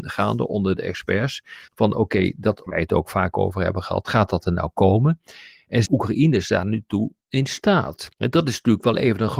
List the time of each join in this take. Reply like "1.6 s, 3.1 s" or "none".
1.7 s, 2.7 s, 5.9 s, 7.2 s, 8.1 s

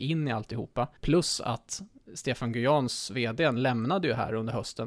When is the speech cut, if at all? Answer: 1.0 s

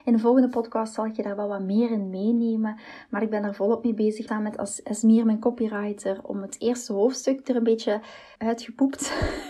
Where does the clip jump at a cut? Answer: 4.3 s, 8.4 s

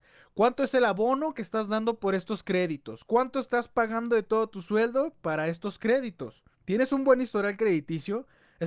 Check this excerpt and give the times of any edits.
6.5 s

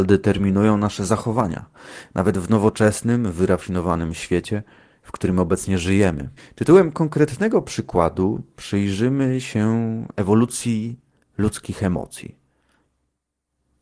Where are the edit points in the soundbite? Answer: 6.4 s

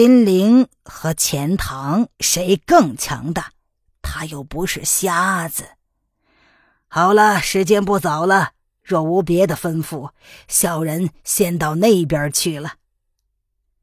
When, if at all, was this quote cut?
2.1 s

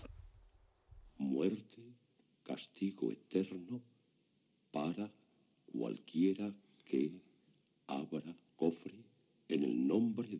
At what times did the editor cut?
8.5 s

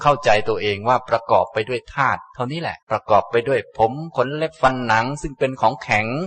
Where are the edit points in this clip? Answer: 2.8 s

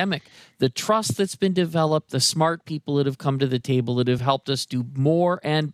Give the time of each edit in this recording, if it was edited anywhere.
none

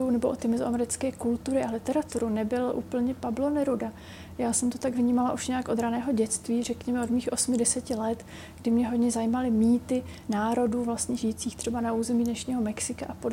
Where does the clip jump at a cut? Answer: none

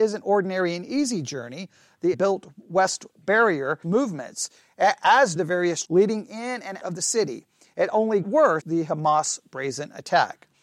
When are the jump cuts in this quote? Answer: 2.1 s, 3.2 s, 3.8 s, 5.4 s, 5.8 s, 6.8 s, 8.2 s, 8.6 s

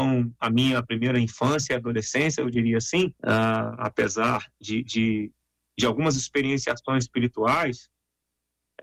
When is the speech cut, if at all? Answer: 3.2 s

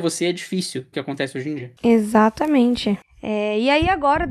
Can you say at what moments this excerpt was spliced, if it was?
0.9 s

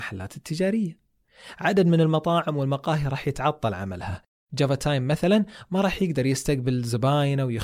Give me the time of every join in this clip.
none

